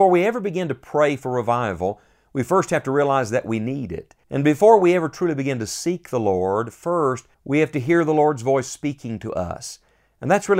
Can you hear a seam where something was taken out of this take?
yes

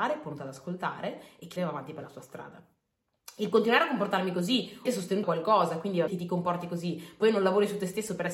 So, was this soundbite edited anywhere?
yes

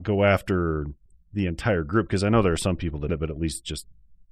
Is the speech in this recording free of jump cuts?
no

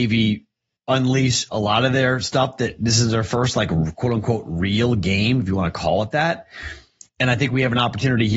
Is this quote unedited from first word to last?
yes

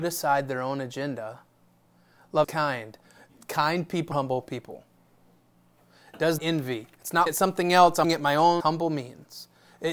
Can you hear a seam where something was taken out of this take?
yes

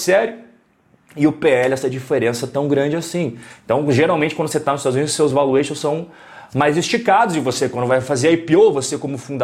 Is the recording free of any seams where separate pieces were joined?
yes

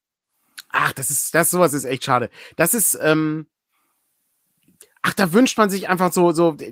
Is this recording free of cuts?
yes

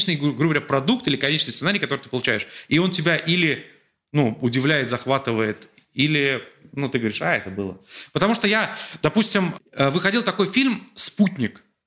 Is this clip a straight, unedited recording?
yes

